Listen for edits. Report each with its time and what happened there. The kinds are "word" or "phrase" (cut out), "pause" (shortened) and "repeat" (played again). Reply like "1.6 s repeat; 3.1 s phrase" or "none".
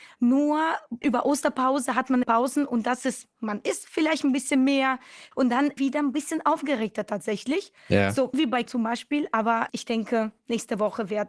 1.0 s word; 2.2 s phrase; 5.8 s phrase; 7.8 s pause; 8.3 s word; 8.7 s word; 9.7 s word